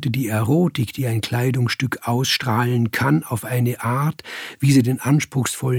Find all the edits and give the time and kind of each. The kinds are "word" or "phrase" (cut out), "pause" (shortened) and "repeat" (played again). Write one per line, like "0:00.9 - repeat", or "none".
none